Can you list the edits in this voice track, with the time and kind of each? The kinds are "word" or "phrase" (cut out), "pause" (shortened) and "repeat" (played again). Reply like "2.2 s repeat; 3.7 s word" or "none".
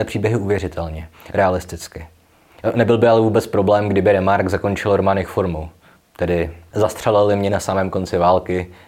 none